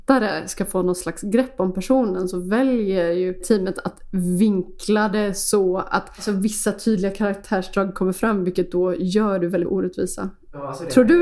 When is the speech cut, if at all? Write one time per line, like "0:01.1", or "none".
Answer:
0:09.6